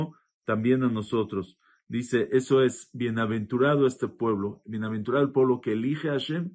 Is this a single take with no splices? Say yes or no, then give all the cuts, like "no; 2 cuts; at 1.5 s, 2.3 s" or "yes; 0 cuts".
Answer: yes; 0 cuts